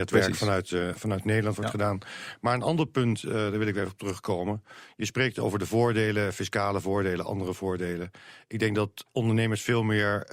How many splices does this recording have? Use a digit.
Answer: 0